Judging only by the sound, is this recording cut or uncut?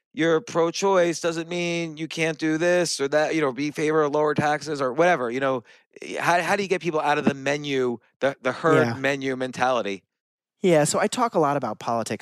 uncut